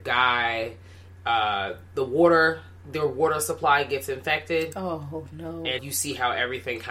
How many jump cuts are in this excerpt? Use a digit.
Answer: 1